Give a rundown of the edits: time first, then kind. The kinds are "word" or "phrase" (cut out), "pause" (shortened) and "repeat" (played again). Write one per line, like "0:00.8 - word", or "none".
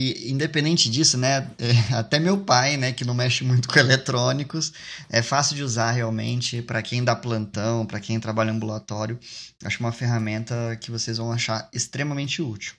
none